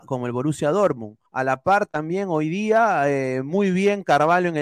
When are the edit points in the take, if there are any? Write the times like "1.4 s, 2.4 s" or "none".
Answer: 1.3 s